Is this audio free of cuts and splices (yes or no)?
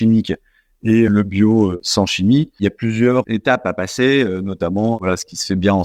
no